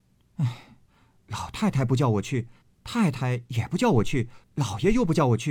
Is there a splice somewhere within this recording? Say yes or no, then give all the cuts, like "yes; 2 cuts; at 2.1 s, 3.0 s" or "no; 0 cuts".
yes; 2 cuts; at 2.6 s, 4.4 s